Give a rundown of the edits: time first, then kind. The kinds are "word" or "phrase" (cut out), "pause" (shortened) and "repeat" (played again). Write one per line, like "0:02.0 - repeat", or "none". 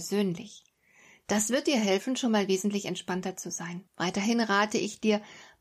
0:03.9 - pause